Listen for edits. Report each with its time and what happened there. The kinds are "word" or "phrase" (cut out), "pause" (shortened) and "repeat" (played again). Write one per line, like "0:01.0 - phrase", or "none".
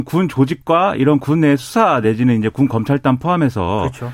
none